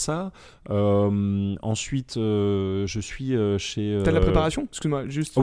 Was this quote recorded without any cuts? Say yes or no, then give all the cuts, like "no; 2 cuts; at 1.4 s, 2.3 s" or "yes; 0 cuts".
yes; 0 cuts